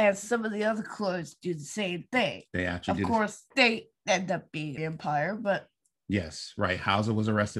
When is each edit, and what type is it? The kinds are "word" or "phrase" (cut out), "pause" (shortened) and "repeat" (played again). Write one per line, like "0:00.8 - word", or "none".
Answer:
0:03.5 - pause
0:04.8 - phrase